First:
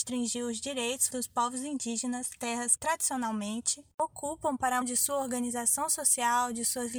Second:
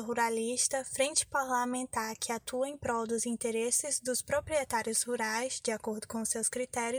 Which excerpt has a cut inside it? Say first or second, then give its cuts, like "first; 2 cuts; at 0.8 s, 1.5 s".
first; 5 cuts; at 1.1 s, 2.4 s, 2.8 s, 3.9 s, 4.8 s